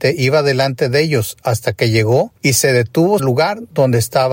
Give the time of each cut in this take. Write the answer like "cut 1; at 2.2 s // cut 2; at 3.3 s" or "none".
cut 1; at 2.4 s // cut 2; at 3.2 s

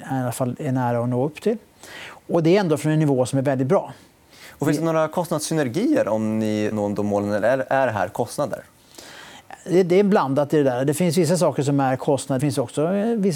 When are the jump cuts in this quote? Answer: cut 1; at 6.7 s // cut 2; at 12.4 s

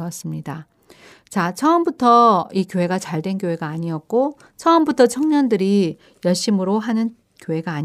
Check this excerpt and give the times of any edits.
none

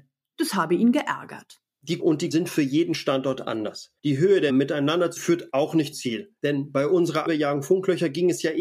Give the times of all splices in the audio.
cut 1; at 2.0 s // cut 2; at 2.3 s // cut 3; at 4.0 s // cut 4; at 4.5 s // cut 5; at 5.2 s // cut 6; at 5.9 s // cut 7; at 6.4 s // cut 8; at 7.3 s

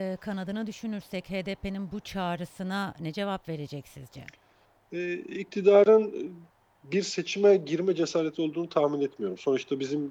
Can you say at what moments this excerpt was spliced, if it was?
none

